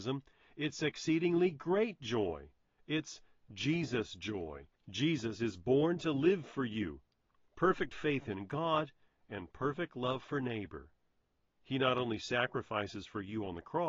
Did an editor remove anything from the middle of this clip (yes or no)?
yes